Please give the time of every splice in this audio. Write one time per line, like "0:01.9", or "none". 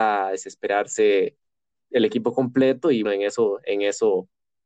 0:03.0